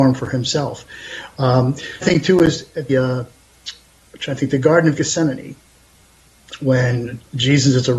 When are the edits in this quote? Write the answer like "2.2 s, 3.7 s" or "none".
2.0 s, 2.9 s